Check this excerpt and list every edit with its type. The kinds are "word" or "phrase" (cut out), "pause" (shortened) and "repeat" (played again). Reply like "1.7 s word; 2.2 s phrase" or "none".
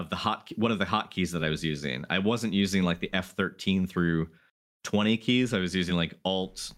none